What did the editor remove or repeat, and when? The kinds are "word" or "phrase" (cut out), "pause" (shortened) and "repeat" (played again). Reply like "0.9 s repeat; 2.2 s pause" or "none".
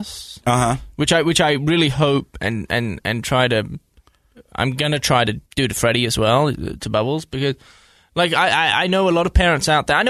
5.5 s pause